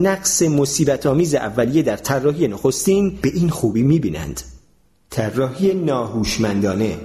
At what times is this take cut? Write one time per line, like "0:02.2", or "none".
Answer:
none